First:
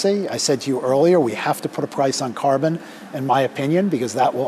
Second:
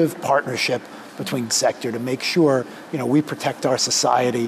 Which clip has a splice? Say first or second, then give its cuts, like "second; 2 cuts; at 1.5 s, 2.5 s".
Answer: second; 1 cut; at 1.5 s